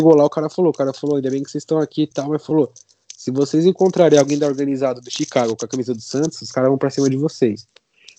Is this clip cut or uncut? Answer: uncut